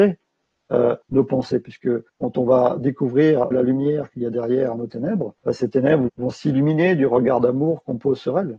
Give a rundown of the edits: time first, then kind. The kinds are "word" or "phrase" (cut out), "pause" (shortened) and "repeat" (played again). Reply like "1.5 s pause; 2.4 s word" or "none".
1.0 s pause; 2.1 s pause; 3.5 s phrase; 5.4 s pause; 6.1 s word